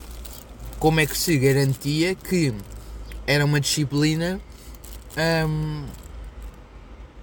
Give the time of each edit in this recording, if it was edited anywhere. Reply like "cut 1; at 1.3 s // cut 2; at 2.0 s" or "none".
none